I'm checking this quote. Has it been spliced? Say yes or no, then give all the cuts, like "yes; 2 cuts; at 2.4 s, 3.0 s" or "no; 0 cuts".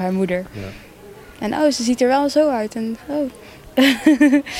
no; 0 cuts